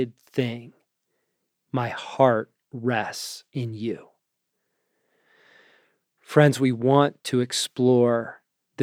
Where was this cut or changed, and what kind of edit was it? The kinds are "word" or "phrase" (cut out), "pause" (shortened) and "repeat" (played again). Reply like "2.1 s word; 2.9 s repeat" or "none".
3.5 s pause